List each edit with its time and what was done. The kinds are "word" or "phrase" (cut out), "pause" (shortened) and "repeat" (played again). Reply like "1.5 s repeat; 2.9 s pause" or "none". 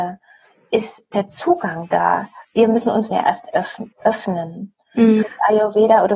1.1 s word; 3.1 s phrase; 3.9 s pause; 5.2 s word